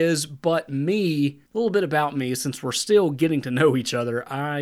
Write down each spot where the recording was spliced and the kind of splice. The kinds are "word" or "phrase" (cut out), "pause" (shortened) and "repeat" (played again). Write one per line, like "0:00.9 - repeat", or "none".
0:01.5 - pause